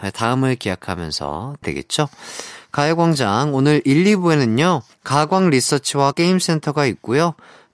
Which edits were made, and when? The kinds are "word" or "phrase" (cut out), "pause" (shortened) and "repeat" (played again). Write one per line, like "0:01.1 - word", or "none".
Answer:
0:01.6 - phrase
0:04.9 - pause
0:06.1 - word

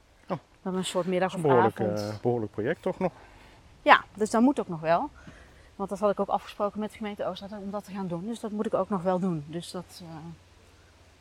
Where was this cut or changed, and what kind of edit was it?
none

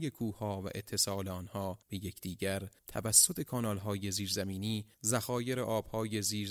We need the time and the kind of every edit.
0:01.8 - pause
0:02.8 - pause
0:04.9 - pause

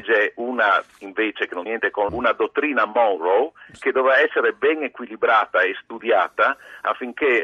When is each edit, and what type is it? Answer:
0:01.7 - word
0:02.1 - word

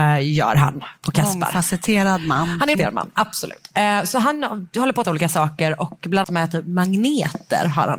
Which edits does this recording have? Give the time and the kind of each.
0:02.7 - word
0:05.0 - phrase
0:06.2 - word

